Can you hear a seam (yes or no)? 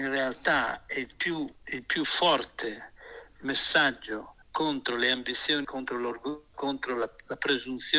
yes